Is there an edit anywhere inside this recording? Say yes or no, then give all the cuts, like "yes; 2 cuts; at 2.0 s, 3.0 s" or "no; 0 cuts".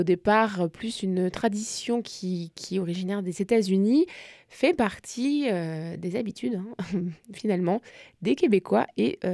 no; 0 cuts